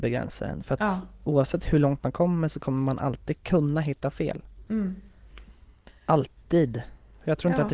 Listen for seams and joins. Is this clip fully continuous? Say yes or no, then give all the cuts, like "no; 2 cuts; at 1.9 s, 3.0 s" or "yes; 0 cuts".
yes; 0 cuts